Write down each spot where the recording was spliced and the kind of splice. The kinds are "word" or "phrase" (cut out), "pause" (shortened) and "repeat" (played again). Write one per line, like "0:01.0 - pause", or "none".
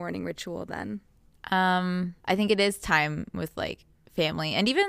0:02.2 - pause